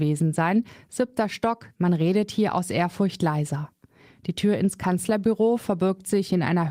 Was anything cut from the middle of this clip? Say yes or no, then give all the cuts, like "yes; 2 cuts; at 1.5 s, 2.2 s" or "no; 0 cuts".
no; 0 cuts